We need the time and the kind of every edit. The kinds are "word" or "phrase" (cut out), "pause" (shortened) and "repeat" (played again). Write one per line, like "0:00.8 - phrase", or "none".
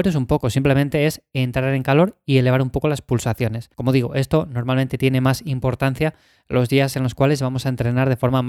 0:03.7 - pause